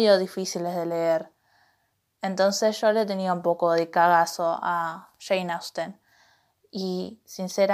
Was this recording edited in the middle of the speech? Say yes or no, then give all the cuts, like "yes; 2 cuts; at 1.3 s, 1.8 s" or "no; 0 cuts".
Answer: no; 0 cuts